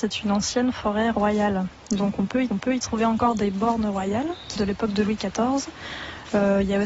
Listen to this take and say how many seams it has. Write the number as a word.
two